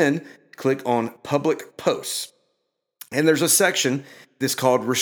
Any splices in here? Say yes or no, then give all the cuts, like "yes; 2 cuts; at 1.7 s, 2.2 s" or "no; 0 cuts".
no; 0 cuts